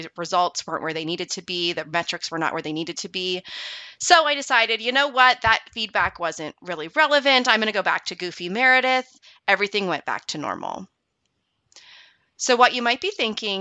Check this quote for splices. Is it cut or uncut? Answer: uncut